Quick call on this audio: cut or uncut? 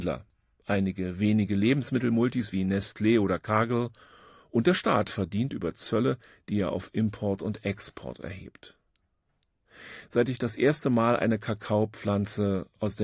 uncut